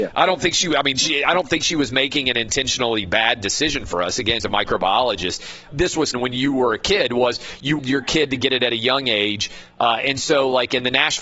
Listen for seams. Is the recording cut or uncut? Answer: cut